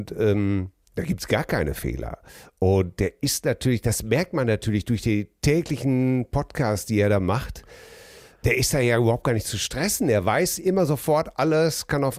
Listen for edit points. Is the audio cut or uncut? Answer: uncut